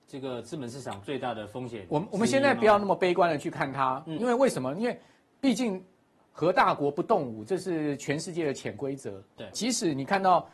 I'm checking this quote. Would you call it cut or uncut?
cut